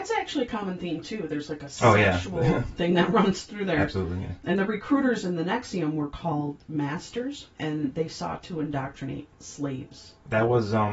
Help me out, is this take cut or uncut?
cut